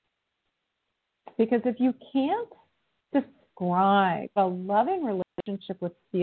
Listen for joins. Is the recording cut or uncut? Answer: cut